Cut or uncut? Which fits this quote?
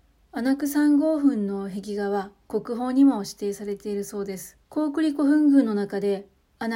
cut